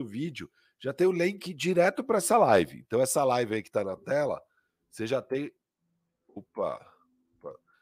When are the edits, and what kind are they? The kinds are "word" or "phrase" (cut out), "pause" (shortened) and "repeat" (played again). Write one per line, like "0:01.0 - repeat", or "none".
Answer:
none